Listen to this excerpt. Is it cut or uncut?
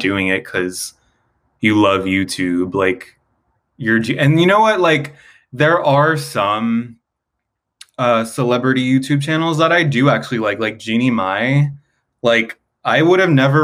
uncut